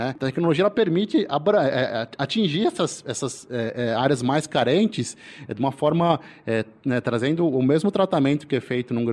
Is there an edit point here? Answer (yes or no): no